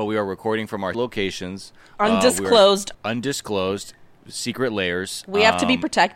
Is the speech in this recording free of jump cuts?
no; 2 cuts; at 0.9 s, 2.9 s

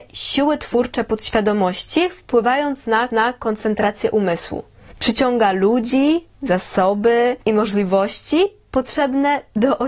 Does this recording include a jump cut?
yes; 3 cuts; at 3.1 s, 4.9 s, 7.4 s

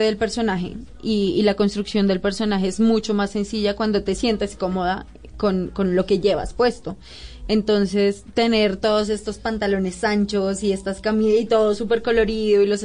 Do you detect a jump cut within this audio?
no; 0 cuts

